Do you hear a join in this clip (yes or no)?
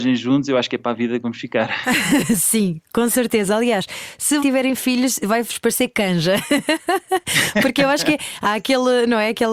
yes